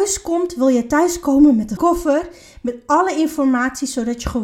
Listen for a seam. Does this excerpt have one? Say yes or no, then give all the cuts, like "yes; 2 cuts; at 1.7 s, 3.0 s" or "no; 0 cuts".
yes; 1 cut; at 1.8 s